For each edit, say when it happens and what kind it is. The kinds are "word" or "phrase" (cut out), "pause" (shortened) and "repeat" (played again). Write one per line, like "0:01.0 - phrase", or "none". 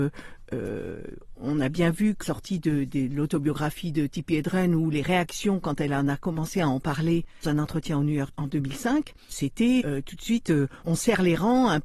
0:01.4 - word
0:02.2 - word
0:02.9 - word
0:07.4 - word
0:08.3 - word
0:09.3 - word
0:09.8 - word
0:10.8 - word